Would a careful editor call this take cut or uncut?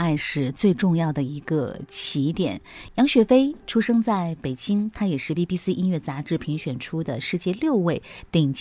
uncut